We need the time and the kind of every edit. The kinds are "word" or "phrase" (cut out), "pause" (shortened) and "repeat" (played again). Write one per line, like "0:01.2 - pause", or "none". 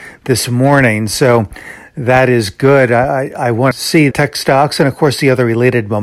0:03.7 - word
0:04.1 - word